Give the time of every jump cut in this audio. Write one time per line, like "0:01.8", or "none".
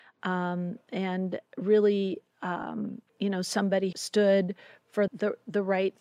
0:01.5
0:03.1
0:03.9
0:05.1